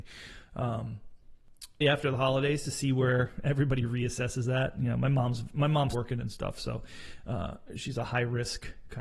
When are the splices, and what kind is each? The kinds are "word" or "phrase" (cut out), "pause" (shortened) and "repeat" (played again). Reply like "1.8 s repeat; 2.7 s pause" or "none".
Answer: 1.8 s word; 5.9 s word

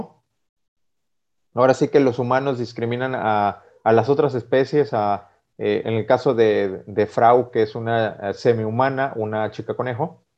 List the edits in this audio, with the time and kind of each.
5.8 s word

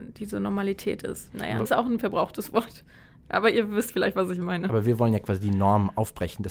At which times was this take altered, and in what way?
1.6 s word

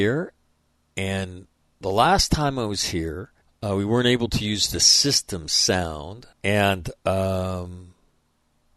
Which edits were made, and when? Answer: 3.4 s pause; 6.3 s pause

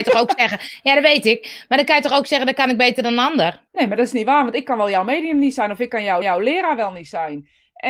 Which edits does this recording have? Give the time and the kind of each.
3.7 s pause; 6.2 s repeat

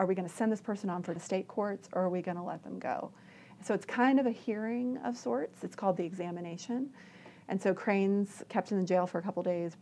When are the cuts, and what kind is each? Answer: 1.2 s phrase

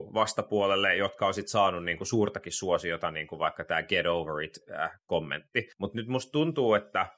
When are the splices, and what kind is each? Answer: 5.7 s pause

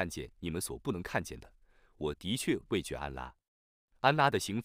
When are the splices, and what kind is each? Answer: none

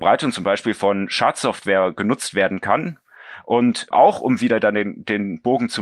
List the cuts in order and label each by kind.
3.9 s word

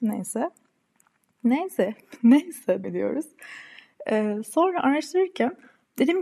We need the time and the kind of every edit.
2.8 s word

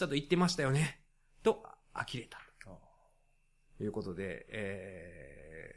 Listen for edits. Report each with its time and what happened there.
none

